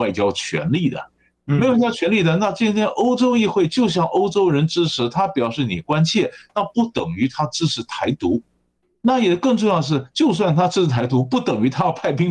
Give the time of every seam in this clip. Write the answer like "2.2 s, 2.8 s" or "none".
none

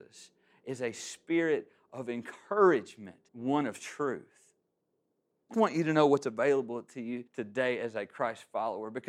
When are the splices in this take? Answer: 3.3 s, 5.5 s, 7.3 s

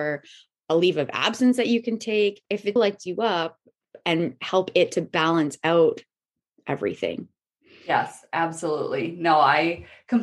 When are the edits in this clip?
2.8 s

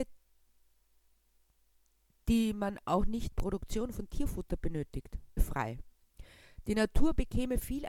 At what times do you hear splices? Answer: 3.3 s, 5.4 s

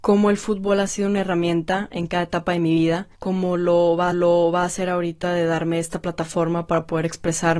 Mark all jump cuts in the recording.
3.1 s, 4.1 s

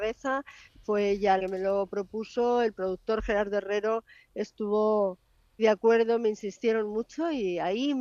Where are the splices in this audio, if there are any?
1.4 s, 5.6 s

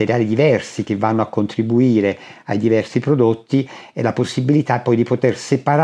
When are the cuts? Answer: none

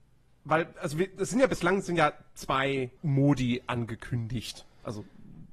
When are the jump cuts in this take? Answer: 3.0 s

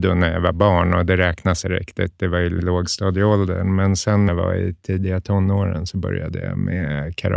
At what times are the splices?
1.6 s, 2.6 s, 4.3 s

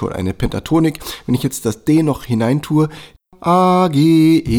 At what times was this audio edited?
none

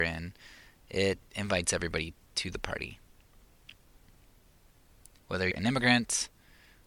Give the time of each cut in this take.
5.5 s

